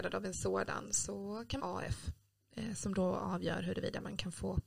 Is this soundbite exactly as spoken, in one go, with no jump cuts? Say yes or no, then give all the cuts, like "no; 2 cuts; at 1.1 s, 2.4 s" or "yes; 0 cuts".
no; 1 cut; at 1.6 s